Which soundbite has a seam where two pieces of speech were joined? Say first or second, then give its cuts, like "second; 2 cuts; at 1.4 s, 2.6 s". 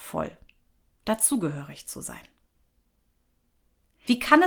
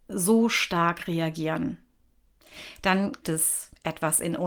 second; 1 cut; at 3.2 s